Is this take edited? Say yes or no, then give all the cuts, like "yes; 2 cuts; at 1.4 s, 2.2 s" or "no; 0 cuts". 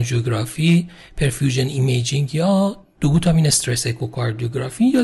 no; 0 cuts